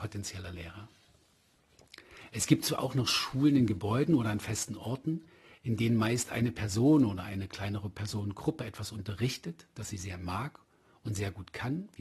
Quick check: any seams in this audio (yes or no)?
no